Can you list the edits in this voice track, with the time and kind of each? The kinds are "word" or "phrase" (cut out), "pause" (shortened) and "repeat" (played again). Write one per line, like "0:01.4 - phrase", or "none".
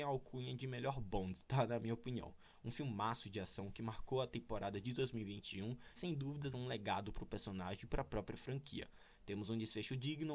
0:06.0 - word
0:06.5 - word